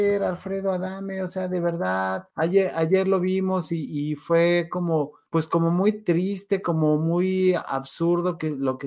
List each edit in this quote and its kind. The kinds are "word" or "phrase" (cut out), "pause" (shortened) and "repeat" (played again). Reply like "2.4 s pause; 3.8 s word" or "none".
2.3 s pause; 5.3 s pause